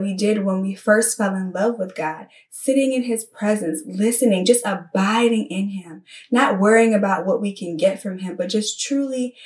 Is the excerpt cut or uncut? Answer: uncut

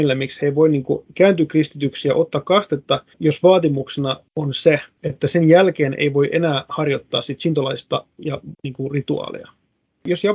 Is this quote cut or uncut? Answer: cut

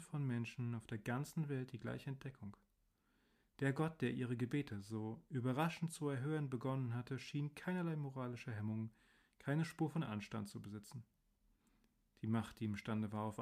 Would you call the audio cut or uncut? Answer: uncut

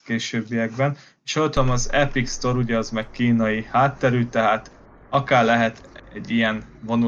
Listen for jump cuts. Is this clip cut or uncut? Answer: uncut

